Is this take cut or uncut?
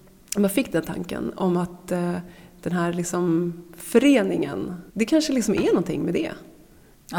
cut